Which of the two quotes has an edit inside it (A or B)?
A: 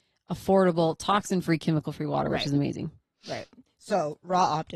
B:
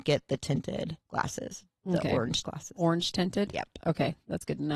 B